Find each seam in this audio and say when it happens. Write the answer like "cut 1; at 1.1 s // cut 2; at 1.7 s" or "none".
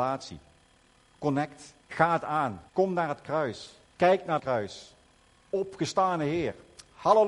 cut 1; at 1.8 s // cut 2; at 2.7 s // cut 3; at 3.8 s // cut 4; at 4.4 s